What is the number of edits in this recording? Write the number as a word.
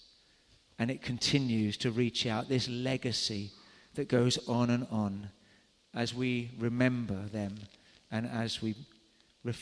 zero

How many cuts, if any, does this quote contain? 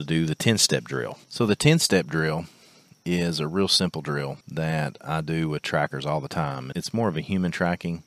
three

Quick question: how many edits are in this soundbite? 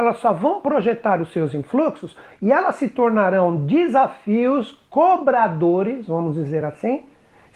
zero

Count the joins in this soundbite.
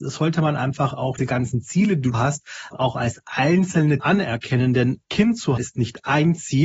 six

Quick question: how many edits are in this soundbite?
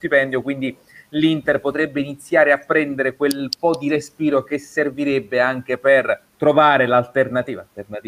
one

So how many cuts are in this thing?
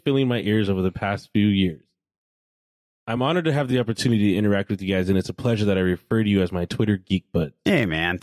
zero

